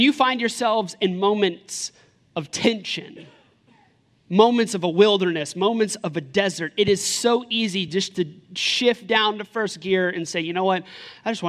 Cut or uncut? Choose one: uncut